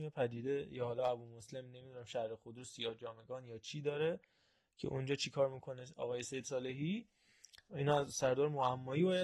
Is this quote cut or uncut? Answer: uncut